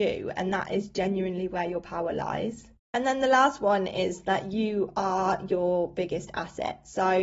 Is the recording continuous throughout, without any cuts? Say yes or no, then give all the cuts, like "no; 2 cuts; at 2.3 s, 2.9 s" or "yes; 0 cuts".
yes; 0 cuts